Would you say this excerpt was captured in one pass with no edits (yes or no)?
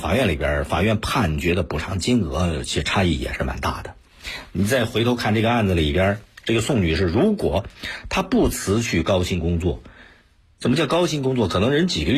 yes